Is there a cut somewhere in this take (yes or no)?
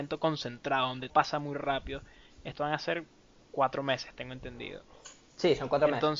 yes